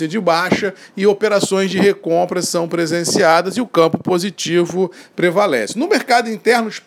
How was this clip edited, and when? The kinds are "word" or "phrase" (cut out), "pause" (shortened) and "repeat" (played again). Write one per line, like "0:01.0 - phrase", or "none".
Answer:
none